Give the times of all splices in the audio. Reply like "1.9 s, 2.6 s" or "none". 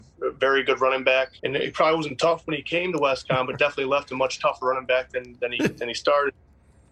1.4 s